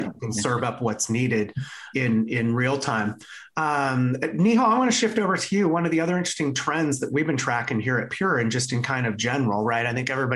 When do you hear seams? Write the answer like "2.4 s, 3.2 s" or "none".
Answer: 1.9 s